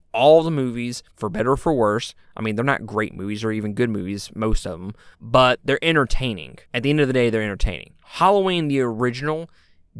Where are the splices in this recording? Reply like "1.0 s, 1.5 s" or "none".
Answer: 1.1 s, 5.1 s, 6.6 s, 8.0 s

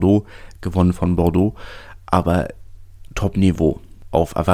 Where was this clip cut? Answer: 3.1 s

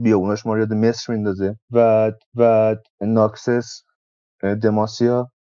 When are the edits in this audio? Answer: 2.3 s

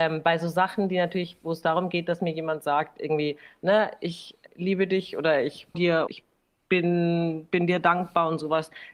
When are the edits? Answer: 4.5 s, 5.7 s, 6.1 s

